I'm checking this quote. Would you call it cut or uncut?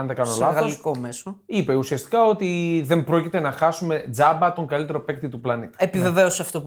uncut